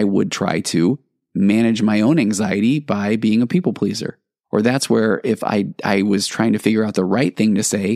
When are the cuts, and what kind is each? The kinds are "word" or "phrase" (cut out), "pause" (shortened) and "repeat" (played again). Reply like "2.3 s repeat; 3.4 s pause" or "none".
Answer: none